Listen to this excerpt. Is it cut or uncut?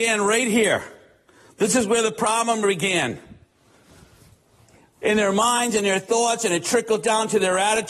uncut